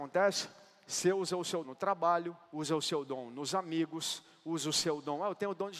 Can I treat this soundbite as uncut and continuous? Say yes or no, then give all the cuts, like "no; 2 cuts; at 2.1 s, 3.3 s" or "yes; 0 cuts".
no; 2 cuts; at 1.6 s, 2.4 s